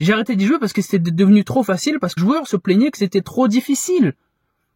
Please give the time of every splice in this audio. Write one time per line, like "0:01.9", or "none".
0:02.2